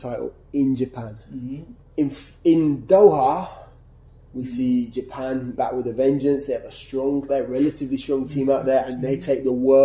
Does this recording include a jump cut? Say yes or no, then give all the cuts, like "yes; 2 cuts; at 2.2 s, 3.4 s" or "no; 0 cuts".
yes; 3 cuts; at 1.8 s, 5.5 s, 7.3 s